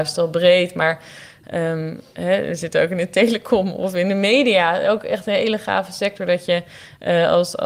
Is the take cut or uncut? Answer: uncut